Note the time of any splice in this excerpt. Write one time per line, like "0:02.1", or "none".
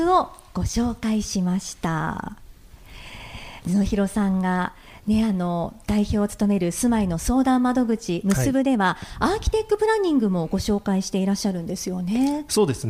none